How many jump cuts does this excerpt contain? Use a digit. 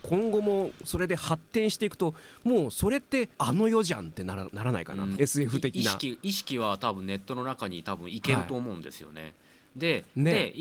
2